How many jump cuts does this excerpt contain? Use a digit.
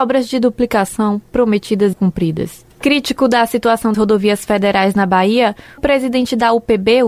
4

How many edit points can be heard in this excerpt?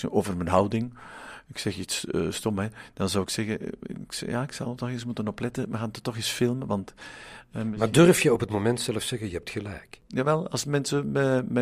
0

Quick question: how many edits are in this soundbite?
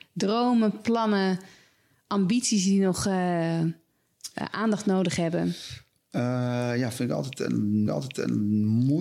1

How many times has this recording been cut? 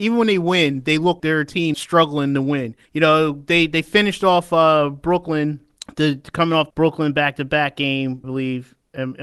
6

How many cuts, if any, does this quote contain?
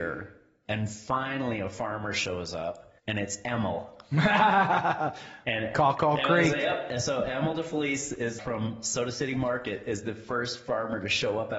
2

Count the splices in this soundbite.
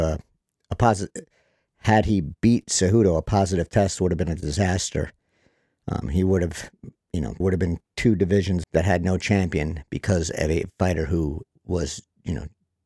3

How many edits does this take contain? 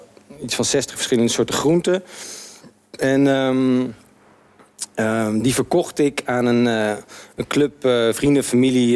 0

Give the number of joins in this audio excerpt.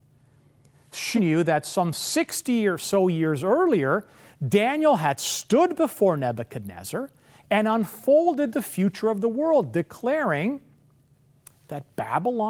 1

